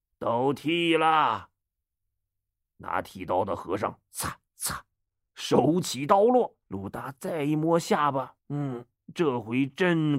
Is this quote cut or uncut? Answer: cut